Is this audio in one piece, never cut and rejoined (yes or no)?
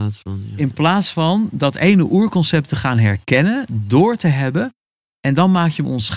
yes